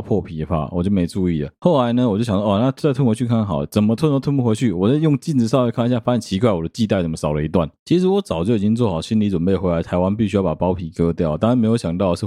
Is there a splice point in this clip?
no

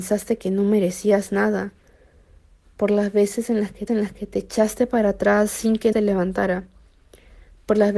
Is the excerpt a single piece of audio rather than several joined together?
no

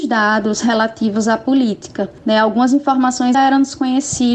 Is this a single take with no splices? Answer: no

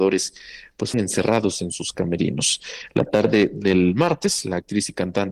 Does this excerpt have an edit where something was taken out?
yes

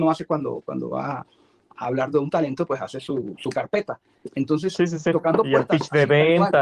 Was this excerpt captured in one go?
yes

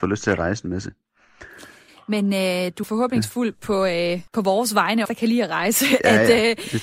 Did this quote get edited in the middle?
yes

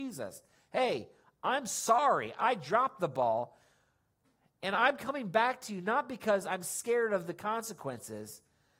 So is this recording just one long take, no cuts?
yes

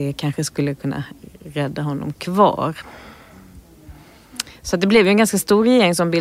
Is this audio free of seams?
yes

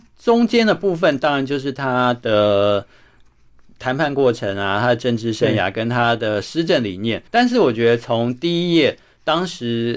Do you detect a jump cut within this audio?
yes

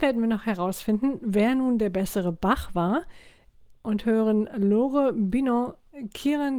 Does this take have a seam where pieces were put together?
no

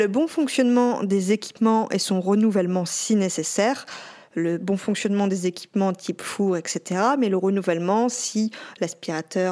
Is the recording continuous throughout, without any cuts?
yes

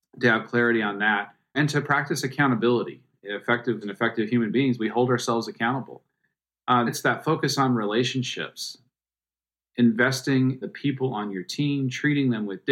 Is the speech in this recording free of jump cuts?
no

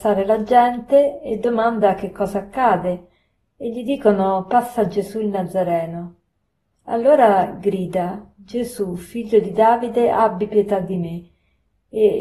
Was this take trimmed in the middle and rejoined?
no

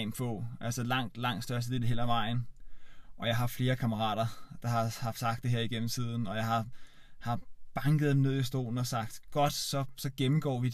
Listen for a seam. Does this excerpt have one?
no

